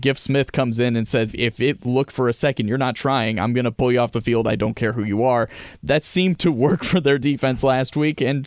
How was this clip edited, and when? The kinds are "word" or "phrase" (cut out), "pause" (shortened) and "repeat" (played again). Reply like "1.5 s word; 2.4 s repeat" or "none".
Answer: 1.3 s word; 2.1 s word